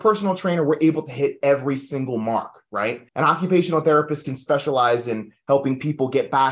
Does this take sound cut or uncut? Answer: cut